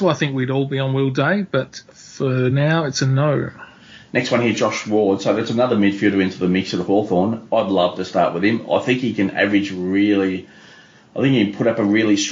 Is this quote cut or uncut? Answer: uncut